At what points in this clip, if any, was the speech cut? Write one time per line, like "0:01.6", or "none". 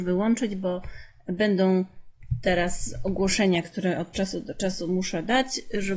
none